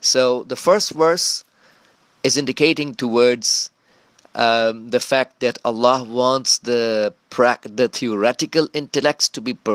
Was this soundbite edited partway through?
no; 0 cuts

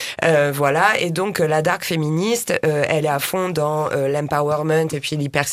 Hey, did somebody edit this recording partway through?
no; 0 cuts

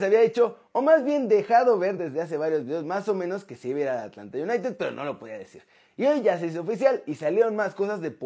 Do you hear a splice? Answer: no; 0 cuts

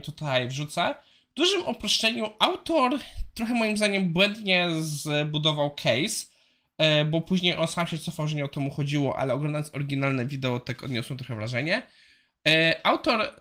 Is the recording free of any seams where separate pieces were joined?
yes; 0 cuts

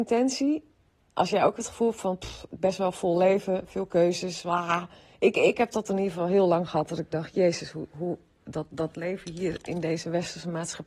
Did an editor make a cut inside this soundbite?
no; 0 cuts

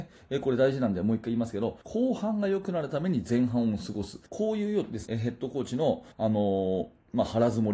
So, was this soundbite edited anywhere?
yes; 4 cuts; at 1.8 s, 4.3 s, 5.1 s, 6.1 s

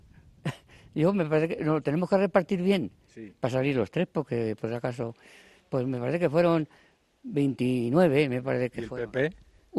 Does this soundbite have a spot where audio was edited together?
no; 0 cuts

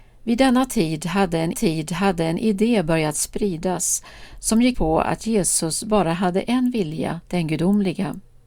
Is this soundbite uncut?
no; 3 cuts; at 1.5 s, 4.7 s, 7.2 s

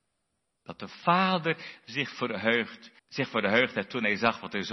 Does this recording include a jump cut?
yes; 1 cut; at 3.0 s

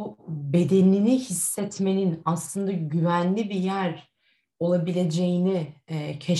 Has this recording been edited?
no; 0 cuts

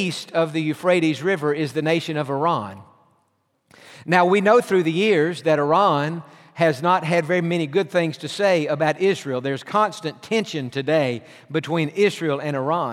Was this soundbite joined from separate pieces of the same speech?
no; 0 cuts

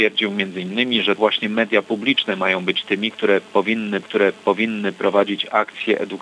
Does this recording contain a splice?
yes; 2 cuts; at 1.2 s, 4.0 s

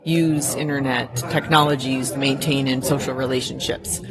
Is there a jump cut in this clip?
yes; 2 cuts; at 2.1 s, 2.8 s

